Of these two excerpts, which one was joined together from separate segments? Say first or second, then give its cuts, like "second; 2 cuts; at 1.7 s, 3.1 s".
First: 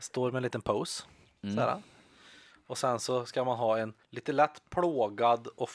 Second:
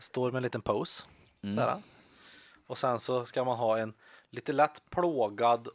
first; 1 cut; at 4.0 s